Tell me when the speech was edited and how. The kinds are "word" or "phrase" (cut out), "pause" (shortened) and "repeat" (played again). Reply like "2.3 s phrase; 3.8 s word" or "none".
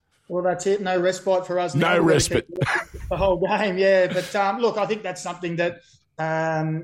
none